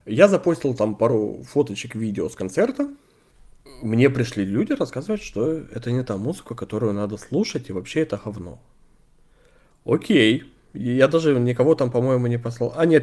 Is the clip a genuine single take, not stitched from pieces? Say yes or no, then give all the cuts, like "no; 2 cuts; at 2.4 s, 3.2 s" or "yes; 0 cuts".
yes; 0 cuts